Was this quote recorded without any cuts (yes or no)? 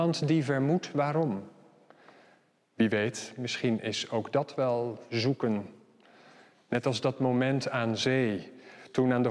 yes